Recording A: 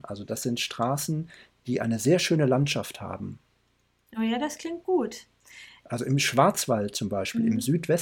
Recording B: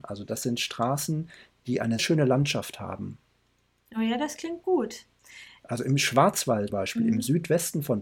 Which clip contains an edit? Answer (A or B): B